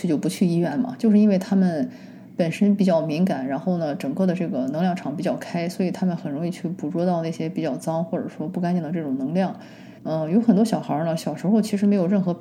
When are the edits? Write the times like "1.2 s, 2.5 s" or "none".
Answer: 10.0 s